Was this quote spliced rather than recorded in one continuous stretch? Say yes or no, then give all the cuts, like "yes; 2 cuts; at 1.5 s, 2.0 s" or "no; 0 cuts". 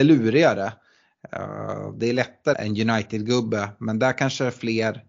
yes; 1 cut; at 2.5 s